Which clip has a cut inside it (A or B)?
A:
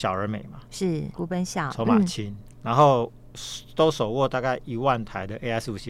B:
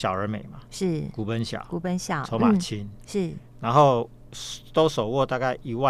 A